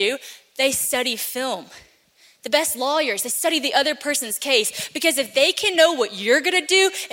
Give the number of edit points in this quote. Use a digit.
0